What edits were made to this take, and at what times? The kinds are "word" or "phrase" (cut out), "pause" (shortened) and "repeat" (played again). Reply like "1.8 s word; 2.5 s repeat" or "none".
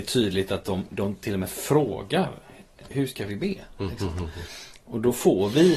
2.9 s word